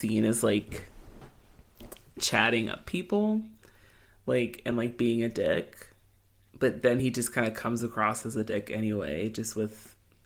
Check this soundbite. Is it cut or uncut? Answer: uncut